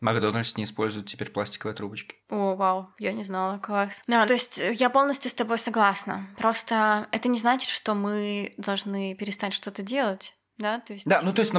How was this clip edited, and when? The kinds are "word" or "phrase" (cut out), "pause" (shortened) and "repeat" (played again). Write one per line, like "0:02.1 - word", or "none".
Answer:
0:02.2 - pause
0:04.3 - word
0:10.4 - pause